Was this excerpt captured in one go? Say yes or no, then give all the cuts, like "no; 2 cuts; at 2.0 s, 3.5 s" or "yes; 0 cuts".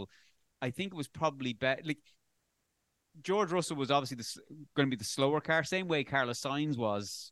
yes; 0 cuts